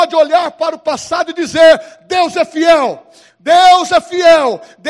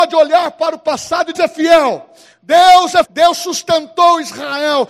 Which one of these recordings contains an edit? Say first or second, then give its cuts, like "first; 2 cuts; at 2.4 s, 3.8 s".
second; 2 cuts; at 1.3 s, 3.0 s